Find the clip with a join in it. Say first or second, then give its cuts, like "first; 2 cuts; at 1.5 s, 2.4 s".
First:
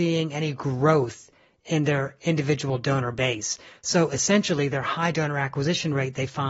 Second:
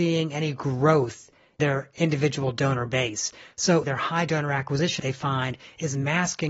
second; 3 cuts; at 1.6 s, 3.8 s, 5.0 s